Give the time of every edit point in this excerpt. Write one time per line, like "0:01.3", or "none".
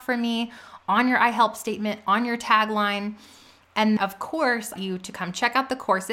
0:04.0
0:04.8